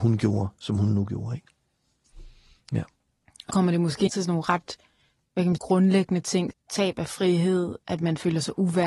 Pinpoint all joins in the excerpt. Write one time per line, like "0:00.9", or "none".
0:03.5
0:04.1
0:05.6
0:06.5
0:07.8